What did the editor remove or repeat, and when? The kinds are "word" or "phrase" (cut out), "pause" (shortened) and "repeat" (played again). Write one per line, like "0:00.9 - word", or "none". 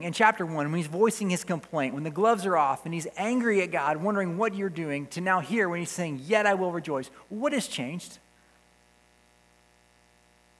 none